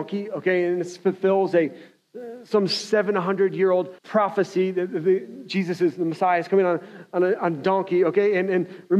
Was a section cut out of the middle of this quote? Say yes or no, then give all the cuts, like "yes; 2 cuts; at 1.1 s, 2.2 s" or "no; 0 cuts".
yes; 1 cut; at 4.0 s